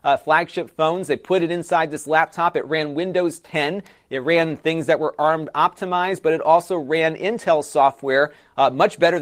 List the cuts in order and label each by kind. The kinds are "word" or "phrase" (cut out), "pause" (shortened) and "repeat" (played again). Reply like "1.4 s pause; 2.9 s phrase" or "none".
none